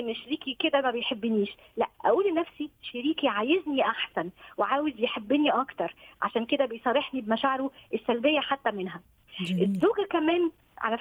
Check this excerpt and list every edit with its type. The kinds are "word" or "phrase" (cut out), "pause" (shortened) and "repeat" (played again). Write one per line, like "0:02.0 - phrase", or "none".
0:01.9 - pause